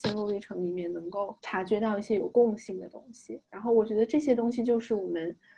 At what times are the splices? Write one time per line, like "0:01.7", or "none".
0:01.4